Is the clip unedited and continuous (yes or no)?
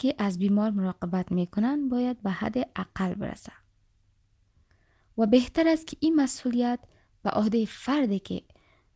yes